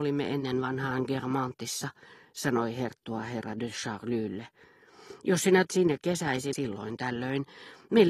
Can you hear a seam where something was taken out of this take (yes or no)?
yes